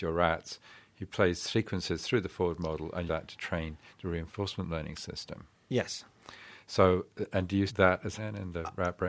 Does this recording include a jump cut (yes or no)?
yes